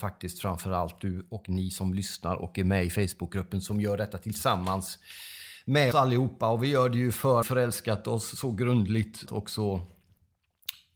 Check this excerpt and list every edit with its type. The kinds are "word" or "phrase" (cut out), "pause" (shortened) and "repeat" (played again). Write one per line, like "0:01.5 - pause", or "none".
0:05.9 - word
0:07.4 - phrase
0:09.3 - phrase